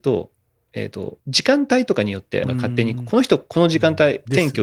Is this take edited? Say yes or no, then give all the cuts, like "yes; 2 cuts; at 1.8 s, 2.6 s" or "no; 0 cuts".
yes; 2 cuts; at 1.2 s, 2.4 s